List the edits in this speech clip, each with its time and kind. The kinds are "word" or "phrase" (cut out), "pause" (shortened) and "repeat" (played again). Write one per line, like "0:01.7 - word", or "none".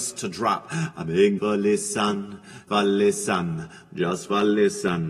0:01.4 - word
0:02.7 - word